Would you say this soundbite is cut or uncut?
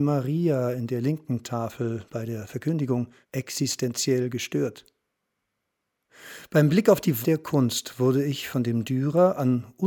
cut